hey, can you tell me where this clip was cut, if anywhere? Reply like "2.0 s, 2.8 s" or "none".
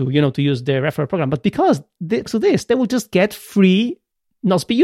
2.2 s